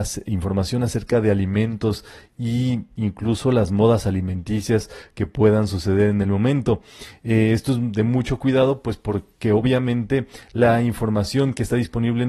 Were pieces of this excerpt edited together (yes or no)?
no